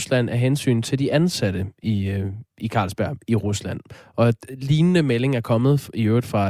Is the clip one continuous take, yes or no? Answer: yes